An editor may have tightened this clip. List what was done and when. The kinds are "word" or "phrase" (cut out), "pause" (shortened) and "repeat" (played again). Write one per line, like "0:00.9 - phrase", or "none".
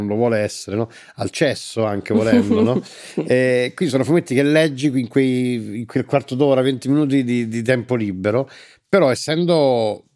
none